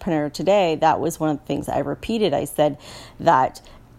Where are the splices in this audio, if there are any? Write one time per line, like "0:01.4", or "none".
0:01.7